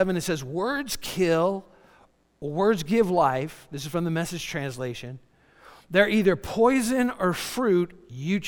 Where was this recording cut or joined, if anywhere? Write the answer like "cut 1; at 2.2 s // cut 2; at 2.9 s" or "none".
none